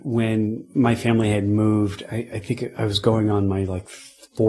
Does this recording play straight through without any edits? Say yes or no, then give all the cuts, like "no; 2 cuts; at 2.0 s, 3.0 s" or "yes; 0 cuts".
yes; 0 cuts